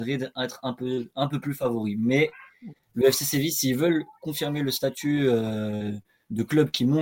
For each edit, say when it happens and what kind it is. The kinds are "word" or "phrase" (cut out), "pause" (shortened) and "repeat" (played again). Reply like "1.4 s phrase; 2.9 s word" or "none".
none